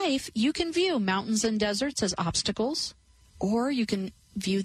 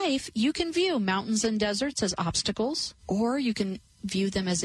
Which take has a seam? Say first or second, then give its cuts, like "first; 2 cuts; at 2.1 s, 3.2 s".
second; 1 cut; at 3.0 s